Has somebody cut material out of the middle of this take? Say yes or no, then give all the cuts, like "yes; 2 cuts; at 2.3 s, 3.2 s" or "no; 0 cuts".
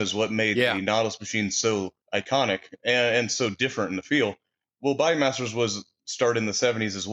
yes; 1 cut; at 2.0 s